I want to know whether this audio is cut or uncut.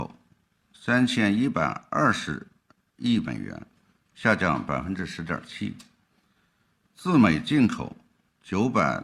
uncut